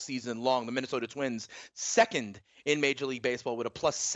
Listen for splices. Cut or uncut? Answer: uncut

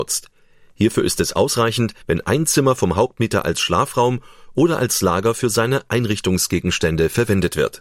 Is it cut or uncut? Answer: cut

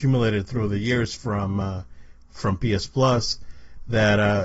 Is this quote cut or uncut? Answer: uncut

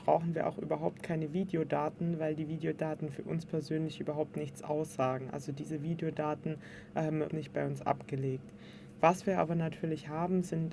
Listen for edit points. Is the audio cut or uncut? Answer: cut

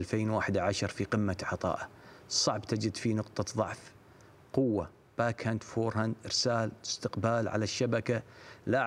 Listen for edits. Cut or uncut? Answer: uncut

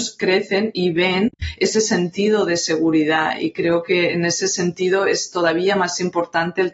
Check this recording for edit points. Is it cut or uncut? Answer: uncut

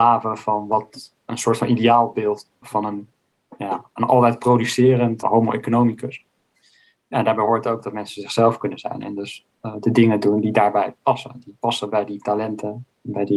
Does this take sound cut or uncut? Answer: cut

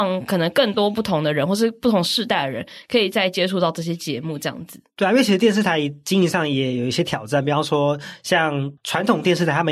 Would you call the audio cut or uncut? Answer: cut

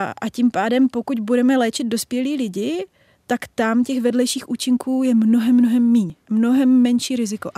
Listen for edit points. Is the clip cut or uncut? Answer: uncut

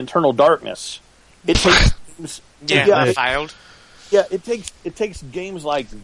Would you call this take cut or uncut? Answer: uncut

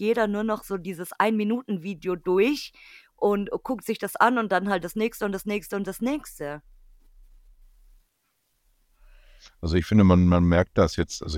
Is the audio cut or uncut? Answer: uncut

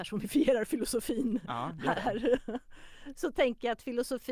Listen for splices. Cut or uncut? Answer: uncut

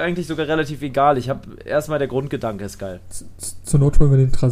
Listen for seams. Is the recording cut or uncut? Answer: uncut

